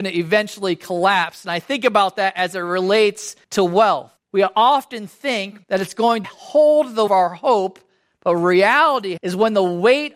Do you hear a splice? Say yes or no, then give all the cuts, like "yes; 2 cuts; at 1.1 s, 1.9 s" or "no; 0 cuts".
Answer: yes; 6 cuts; at 3.4 s, 4.2 s, 5.6 s, 6.2 s, 7.1 s, 9.2 s